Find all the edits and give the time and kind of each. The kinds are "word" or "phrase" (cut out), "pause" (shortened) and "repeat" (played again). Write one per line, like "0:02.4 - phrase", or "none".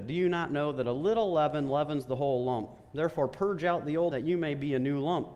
0:04.1 - word